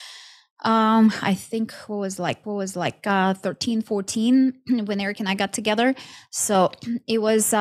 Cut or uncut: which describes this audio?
cut